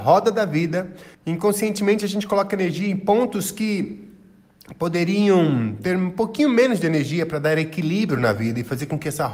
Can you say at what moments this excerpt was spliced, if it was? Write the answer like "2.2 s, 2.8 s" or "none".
1.1 s